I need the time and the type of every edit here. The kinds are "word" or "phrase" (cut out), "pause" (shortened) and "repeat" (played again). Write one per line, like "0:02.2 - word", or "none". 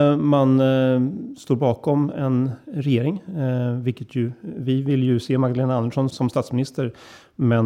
0:06.1 - word